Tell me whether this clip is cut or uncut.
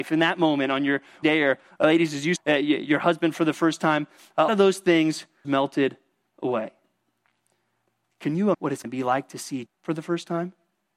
cut